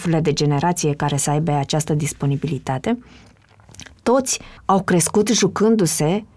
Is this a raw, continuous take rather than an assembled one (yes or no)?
no